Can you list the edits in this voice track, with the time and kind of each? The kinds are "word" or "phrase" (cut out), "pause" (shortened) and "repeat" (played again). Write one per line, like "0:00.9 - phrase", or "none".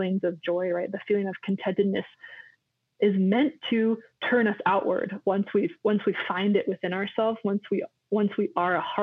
none